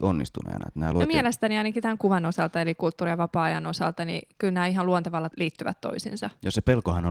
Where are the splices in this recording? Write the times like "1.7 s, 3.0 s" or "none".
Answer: 2.0 s, 5.3 s